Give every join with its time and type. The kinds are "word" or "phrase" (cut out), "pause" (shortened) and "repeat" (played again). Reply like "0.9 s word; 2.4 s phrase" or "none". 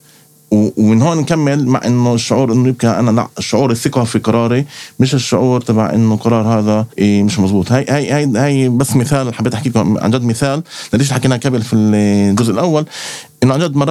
6.9 s pause